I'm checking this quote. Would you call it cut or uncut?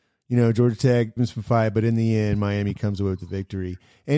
cut